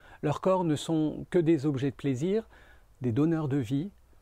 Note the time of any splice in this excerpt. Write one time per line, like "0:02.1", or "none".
none